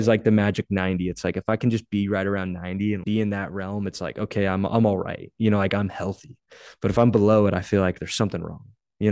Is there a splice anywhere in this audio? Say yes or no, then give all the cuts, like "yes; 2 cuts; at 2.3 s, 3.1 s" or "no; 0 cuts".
yes; 1 cut; at 3.0 s